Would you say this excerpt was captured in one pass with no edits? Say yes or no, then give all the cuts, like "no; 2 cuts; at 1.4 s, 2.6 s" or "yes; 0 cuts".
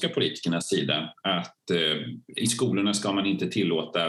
yes; 0 cuts